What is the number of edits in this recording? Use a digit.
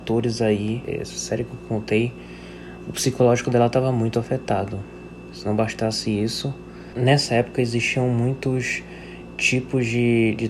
0